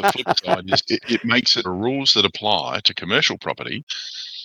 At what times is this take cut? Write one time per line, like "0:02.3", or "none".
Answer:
0:01.6